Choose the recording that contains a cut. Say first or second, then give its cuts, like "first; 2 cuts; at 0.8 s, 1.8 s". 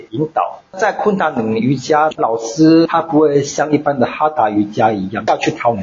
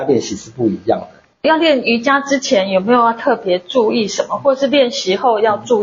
second; 1 cut; at 1.3 s